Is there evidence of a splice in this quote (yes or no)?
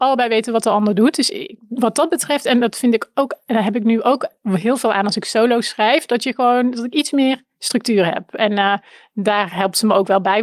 no